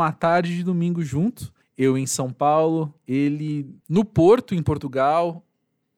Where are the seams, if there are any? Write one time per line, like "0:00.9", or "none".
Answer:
0:01.6
0:03.0